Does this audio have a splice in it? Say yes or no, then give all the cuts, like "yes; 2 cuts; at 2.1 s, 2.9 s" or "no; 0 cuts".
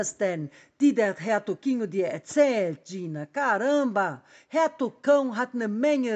no; 0 cuts